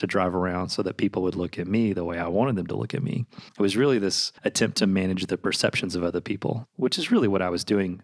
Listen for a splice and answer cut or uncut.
cut